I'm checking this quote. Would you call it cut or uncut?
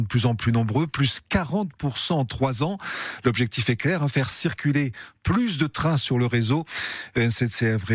uncut